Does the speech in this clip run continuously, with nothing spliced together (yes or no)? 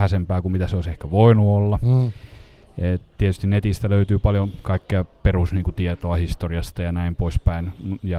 yes